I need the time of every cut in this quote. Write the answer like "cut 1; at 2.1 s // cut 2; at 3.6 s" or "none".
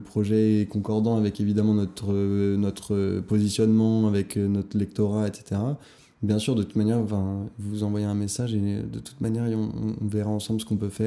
none

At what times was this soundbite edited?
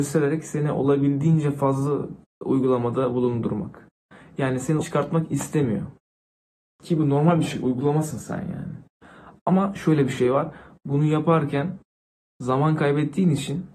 cut 1; at 4.8 s

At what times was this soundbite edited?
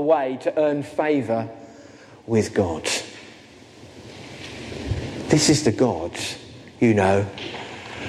none

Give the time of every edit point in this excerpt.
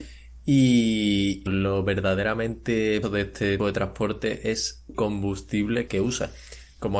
cut 1; at 1.5 s // cut 2; at 3.0 s // cut 3; at 3.6 s // cut 4; at 4.9 s // cut 5; at 5.9 s

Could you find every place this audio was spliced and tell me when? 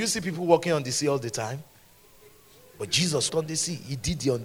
cut 1; at 3.3 s

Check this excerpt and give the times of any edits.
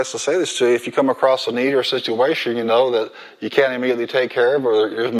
none

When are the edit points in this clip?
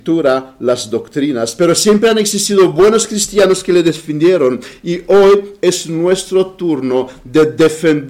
none

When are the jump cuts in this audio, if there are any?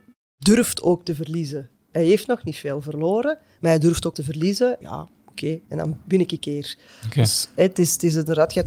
cut 1; at 4.1 s // cut 2; at 4.8 s // cut 3; at 5.6 s // cut 4; at 6.4 s

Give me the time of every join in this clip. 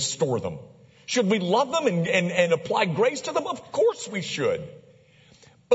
none

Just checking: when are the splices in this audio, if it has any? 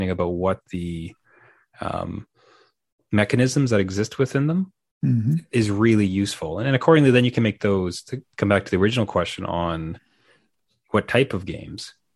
none

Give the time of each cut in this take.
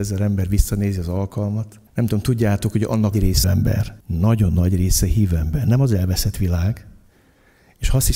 cut 1; at 1.9 s // cut 2; at 3.1 s // cut 3; at 3.4 s // cut 4; at 4.0 s

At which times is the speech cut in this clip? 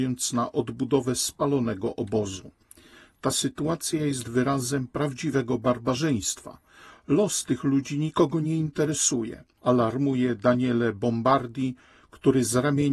none

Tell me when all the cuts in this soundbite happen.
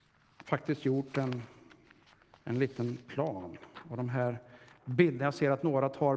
none

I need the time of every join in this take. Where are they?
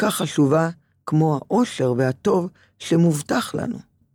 none

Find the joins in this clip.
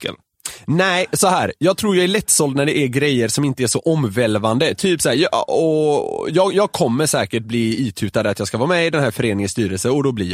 none

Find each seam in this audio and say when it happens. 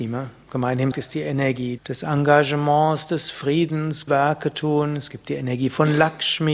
cut 1; at 0.9 s // cut 2; at 1.8 s // cut 3; at 4.1 s

